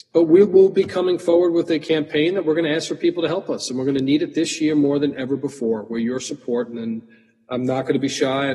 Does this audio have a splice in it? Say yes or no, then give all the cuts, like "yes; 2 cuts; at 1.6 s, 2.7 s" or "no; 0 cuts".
no; 0 cuts